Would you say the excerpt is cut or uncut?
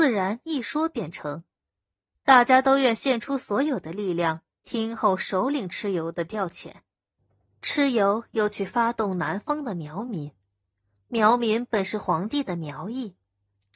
uncut